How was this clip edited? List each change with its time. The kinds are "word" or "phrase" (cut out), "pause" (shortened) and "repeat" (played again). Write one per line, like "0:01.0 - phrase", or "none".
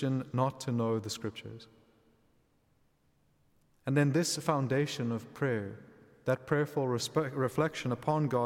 none